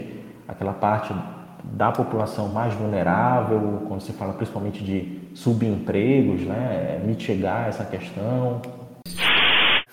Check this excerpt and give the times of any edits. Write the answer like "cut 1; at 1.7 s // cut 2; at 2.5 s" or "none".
none